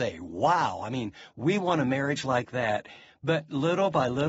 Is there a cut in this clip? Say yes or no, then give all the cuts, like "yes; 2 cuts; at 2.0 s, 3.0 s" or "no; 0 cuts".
no; 0 cuts